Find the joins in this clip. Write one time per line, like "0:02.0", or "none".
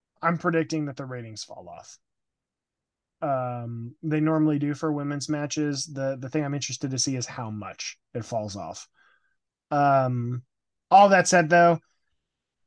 none